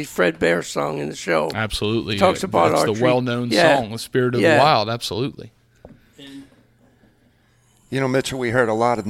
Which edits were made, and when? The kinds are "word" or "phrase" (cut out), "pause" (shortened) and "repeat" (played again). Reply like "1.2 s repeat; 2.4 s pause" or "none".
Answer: none

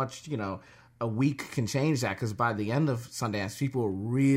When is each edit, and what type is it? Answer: none

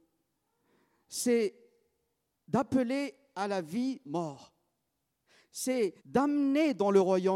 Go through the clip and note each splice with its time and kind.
4.1 s phrase; 6.0 s pause

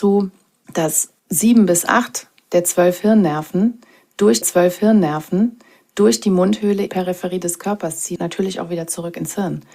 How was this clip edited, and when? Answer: 1.2 s pause; 4.4 s repeat; 6.9 s phrase; 8.2 s word

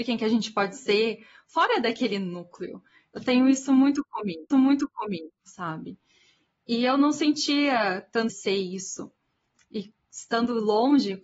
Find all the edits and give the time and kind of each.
4.5 s repeat; 8.3 s phrase

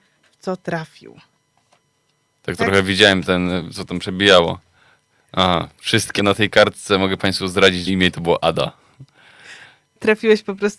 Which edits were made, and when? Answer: 6.2 s word; 7.9 s phrase

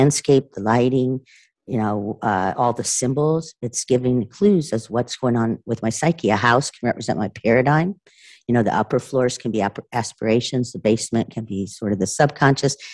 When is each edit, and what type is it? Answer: none

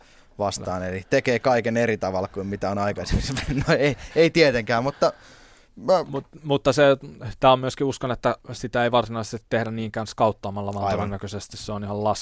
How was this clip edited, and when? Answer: none

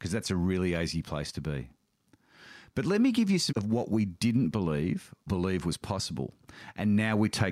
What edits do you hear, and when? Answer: 3.5 s word; 5.3 s word

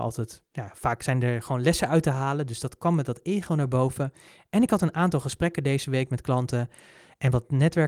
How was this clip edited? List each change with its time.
none

